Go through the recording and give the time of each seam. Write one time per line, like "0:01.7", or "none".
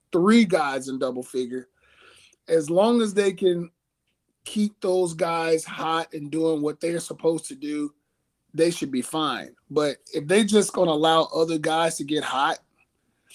0:08.3

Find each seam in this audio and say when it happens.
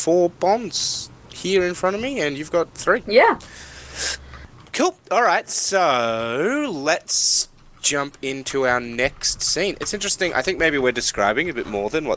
none

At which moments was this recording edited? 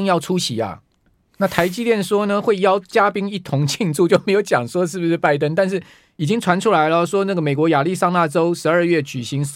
none

